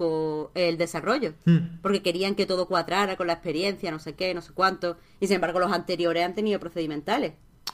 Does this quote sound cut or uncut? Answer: cut